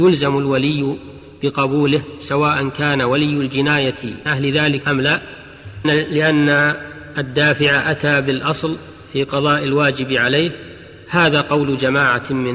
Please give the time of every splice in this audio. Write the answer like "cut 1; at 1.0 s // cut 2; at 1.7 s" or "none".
cut 1; at 4.3 s // cut 2; at 4.8 s // cut 3; at 5.8 s